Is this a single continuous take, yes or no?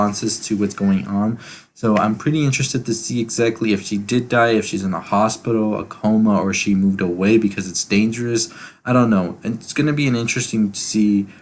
yes